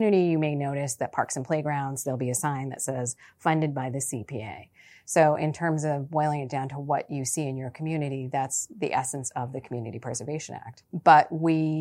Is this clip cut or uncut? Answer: uncut